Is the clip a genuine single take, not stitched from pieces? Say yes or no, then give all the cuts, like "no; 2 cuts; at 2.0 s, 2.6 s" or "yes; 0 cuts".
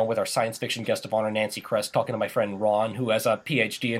yes; 0 cuts